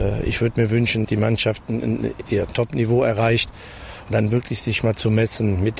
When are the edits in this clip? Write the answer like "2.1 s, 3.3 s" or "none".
1.0 s, 2.3 s, 4.1 s